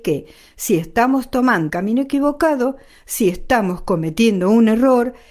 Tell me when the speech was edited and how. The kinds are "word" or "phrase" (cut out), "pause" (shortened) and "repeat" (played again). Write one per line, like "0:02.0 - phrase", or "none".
0:01.7 - word